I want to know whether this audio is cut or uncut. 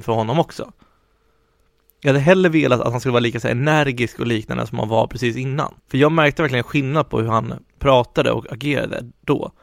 cut